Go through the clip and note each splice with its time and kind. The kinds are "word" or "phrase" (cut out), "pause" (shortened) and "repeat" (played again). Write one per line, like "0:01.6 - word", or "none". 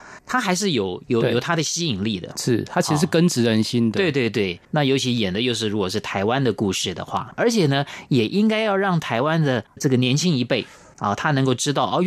none